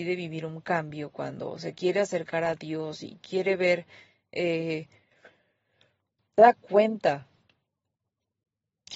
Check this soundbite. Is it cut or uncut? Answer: cut